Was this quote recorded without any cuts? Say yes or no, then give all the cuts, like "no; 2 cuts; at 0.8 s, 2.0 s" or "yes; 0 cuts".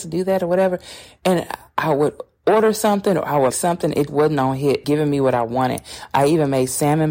no; 3 cuts; at 3.5 s, 4.1 s, 4.8 s